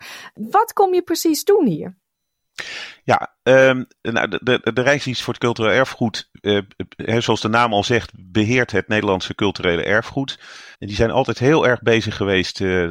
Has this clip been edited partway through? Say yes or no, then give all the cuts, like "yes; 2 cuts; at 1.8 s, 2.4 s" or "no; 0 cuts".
yes; 1 cut; at 10.7 s